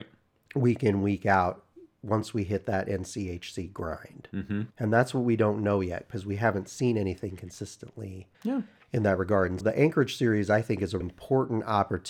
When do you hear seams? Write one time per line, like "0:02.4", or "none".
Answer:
0:04.7
0:08.3
0:09.6
0:11.0